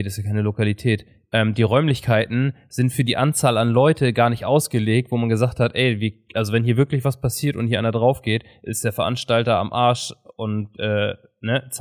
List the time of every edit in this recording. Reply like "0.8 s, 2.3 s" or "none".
none